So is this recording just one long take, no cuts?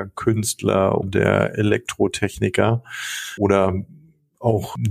no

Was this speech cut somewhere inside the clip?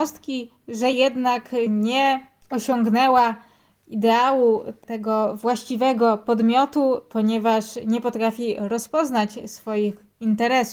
no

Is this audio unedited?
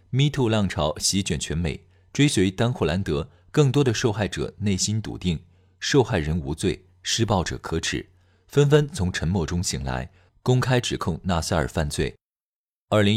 yes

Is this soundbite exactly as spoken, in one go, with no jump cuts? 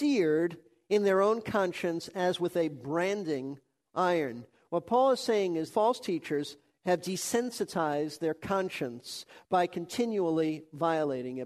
no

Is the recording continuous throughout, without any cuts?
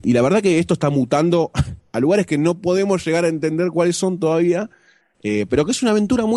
yes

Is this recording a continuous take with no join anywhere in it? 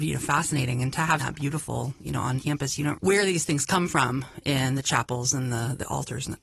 no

